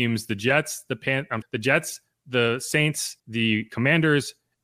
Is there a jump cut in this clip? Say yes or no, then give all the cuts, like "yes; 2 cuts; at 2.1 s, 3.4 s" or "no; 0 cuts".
yes; 2 cuts; at 1.4 s, 3.2 s